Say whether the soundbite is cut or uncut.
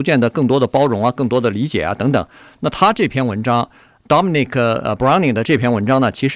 uncut